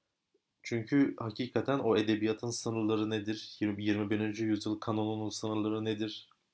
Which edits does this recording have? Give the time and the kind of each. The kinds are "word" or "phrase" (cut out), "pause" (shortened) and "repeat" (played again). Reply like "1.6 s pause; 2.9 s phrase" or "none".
none